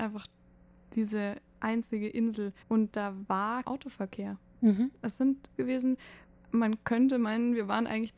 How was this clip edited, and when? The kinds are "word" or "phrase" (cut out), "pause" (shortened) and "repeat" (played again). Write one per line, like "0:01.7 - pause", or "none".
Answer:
0:02.6 - pause
0:03.6 - phrase
0:05.6 - phrase